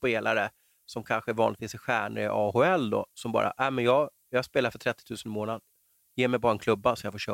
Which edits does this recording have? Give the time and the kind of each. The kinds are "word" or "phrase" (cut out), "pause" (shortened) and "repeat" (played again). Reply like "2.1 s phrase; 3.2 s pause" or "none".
none